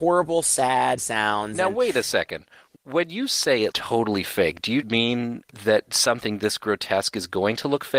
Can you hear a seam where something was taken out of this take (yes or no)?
yes